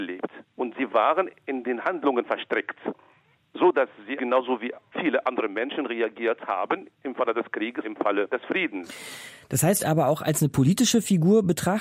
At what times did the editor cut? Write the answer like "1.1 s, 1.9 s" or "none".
4.2 s, 7.8 s, 9.8 s